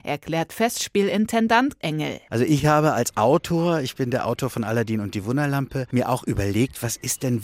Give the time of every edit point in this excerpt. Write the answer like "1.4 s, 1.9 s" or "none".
none

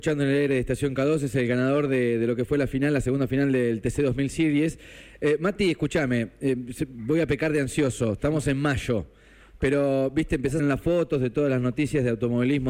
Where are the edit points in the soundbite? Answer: 10.6 s

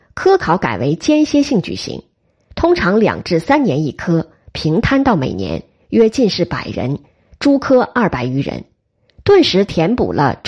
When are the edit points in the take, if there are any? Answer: none

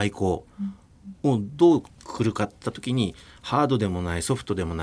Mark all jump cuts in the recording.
1.2 s

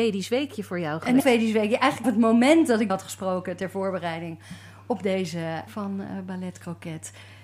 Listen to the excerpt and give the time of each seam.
1.2 s, 2.0 s, 2.9 s, 5.7 s

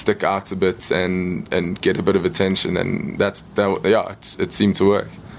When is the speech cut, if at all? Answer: none

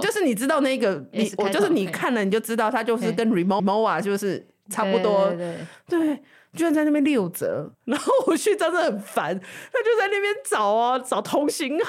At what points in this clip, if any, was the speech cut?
3.6 s, 7.7 s

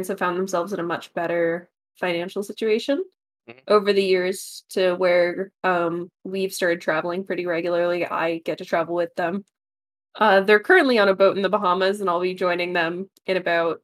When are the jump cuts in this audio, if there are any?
6.1 s

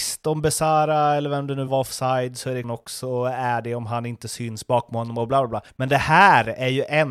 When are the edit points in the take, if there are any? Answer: 1.7 s, 2.6 s, 5.7 s

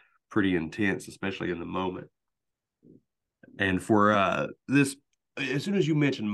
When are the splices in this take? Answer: none

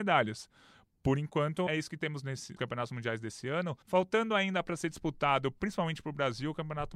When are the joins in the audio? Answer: 1.7 s, 2.6 s, 3.8 s

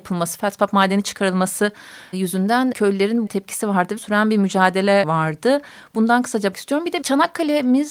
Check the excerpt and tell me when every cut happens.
2.1 s, 2.7 s, 3.3 s, 4.0 s, 5.0 s, 6.5 s, 7.0 s

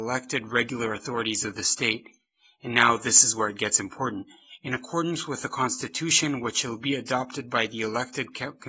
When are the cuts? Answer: none

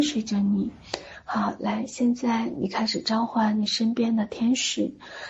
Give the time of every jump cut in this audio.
none

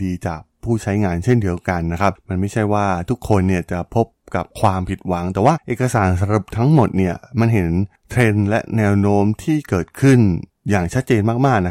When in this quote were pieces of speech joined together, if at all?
4.5 s

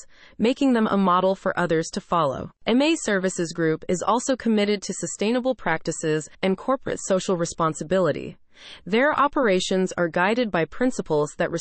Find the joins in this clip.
6.3 s

